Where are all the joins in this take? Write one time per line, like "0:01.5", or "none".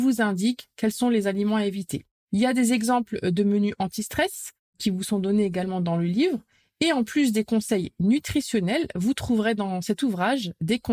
none